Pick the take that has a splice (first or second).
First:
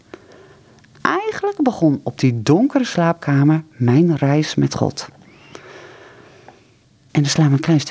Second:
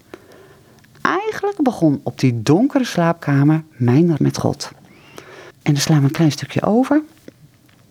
second